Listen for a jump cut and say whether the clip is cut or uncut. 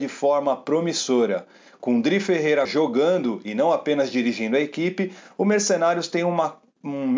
cut